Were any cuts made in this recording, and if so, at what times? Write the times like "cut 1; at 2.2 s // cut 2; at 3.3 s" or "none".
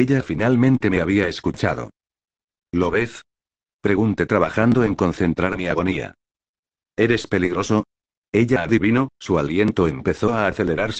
none